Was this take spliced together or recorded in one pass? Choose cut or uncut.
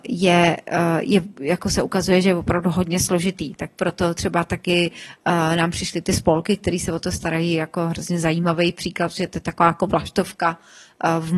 uncut